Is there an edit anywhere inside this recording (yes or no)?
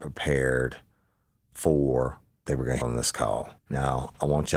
yes